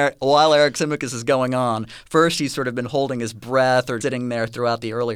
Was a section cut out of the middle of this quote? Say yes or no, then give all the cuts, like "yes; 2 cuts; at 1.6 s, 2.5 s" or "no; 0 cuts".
yes; 1 cut; at 4.0 s